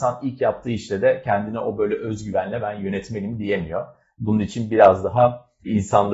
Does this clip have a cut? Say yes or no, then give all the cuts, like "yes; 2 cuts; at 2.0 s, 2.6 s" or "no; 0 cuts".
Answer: no; 0 cuts